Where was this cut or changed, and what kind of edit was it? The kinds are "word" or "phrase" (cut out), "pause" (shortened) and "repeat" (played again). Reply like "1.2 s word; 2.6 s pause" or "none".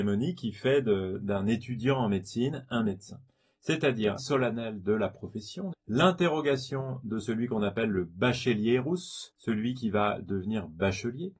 4.2 s word; 5.7 s word; 9.3 s pause